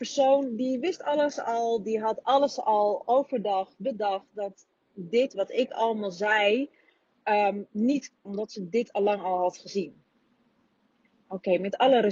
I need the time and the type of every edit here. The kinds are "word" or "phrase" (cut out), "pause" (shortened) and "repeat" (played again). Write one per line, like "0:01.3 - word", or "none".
0:08.2 - phrase